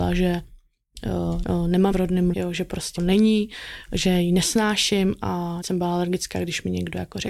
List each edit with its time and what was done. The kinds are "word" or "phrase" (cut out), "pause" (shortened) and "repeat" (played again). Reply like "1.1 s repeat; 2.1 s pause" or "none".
1.4 s phrase; 1.9 s word; 2.3 s word; 3.0 s phrase; 5.6 s word